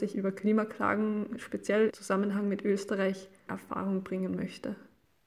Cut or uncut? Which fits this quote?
cut